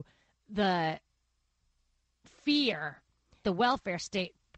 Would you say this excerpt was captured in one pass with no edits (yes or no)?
no